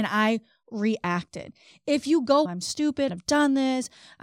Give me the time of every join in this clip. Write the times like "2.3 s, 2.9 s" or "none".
2.5 s, 3.1 s

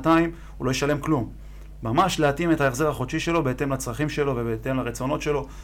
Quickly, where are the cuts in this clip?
none

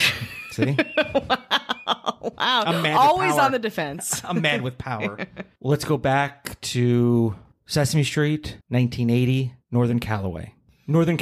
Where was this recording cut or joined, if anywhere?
8.6 s

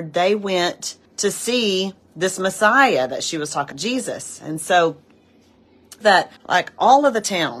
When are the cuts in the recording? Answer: 1.1 s, 3.7 s, 6.0 s, 6.4 s

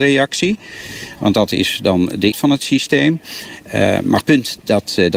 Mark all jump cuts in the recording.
2.3 s, 4.2 s

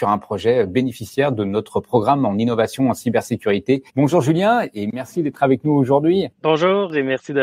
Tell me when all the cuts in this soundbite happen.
3.9 s, 6.3 s

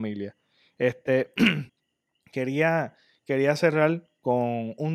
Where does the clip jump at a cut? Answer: 1.7 s

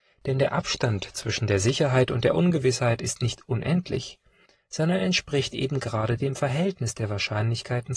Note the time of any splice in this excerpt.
none

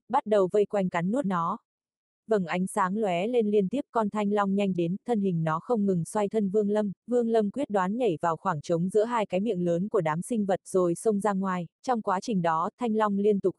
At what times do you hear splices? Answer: 1.2 s, 4.7 s, 6.3 s, 7.0 s, 11.7 s

